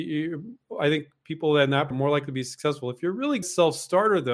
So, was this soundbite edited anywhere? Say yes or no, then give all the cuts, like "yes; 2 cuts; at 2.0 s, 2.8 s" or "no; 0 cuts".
yes; 2 cuts; at 1.9 s, 3.4 s